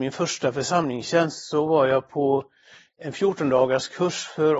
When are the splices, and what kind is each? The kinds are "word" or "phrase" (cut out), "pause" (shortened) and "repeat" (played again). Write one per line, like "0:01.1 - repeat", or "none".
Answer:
none